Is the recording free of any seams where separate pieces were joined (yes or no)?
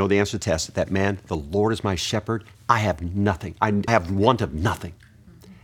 no